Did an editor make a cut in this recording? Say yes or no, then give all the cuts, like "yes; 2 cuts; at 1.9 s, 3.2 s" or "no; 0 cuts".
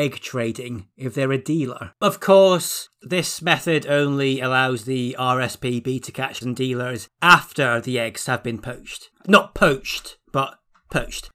yes; 2 cuts; at 1.9 s, 6.4 s